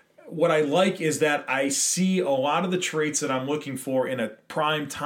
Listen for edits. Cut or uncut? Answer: uncut